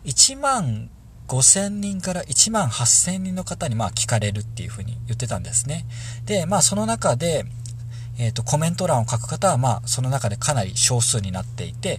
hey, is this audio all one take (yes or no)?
yes